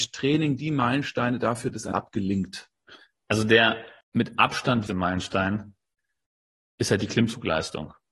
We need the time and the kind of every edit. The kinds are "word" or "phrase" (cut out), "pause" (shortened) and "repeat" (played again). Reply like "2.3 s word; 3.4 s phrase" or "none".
1.9 s word; 4.9 s word